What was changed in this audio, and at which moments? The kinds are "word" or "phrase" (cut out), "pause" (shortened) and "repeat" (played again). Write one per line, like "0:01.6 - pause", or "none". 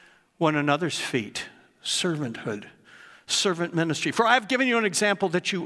none